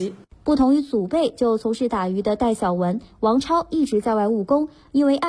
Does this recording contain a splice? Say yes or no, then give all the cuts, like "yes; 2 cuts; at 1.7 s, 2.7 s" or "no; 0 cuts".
no; 0 cuts